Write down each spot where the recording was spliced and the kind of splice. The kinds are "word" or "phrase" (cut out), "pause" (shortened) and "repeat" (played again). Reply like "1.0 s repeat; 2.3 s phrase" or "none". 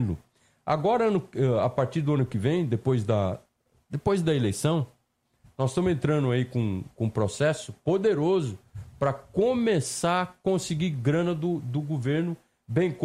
none